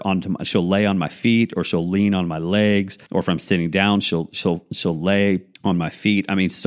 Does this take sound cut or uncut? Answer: cut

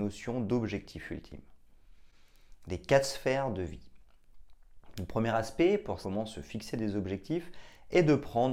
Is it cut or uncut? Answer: cut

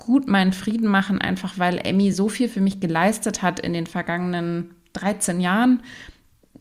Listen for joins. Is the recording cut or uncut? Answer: uncut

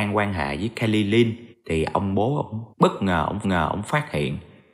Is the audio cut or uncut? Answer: cut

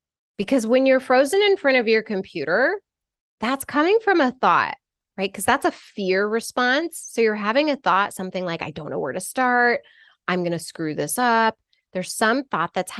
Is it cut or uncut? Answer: uncut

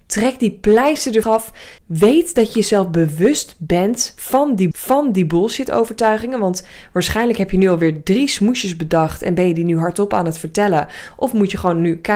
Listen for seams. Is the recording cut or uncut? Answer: cut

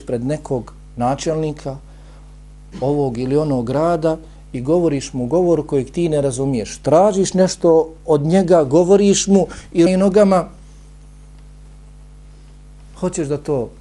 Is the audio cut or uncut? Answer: cut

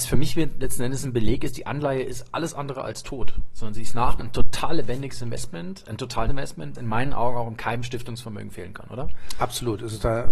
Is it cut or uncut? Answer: cut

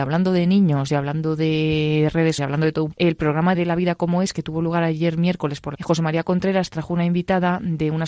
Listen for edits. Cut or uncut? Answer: cut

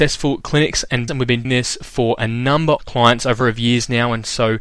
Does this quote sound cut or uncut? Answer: cut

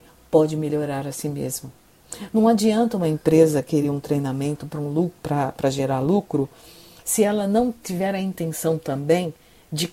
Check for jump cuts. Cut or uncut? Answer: uncut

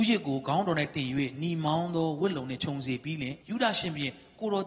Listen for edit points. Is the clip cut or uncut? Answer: cut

